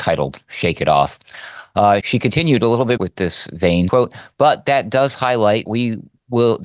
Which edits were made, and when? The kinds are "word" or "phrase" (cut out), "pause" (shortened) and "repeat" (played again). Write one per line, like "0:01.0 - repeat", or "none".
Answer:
0:02.0 - word
0:03.0 - word
0:03.9 - word
0:05.7 - word